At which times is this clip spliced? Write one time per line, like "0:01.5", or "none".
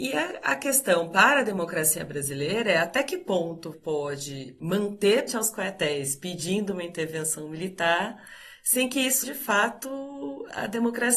0:03.7
0:05.3
0:09.2